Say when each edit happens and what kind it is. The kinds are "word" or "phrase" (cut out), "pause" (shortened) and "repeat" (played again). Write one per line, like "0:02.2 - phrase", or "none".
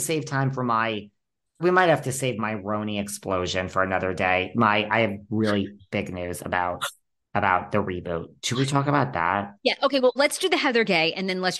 0:01.6 - word
0:10.2 - word